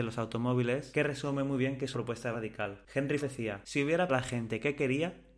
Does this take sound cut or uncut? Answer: cut